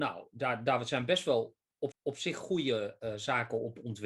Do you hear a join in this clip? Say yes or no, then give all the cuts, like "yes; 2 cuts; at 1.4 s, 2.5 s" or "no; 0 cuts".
yes; 1 cut; at 1.9 s